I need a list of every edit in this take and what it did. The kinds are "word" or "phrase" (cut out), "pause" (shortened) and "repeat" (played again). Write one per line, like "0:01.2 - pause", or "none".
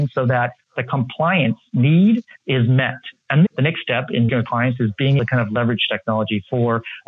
0:03.5 - word
0:04.3 - word
0:05.2 - word